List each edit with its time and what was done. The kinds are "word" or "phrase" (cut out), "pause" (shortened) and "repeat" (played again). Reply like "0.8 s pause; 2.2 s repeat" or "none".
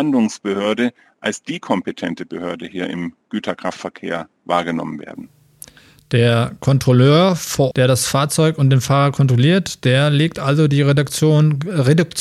7.7 s word